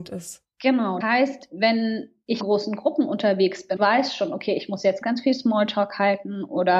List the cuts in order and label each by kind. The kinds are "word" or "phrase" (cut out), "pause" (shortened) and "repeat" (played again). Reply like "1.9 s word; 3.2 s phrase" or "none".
1.0 s word; 2.4 s word; 3.8 s word; 5.0 s word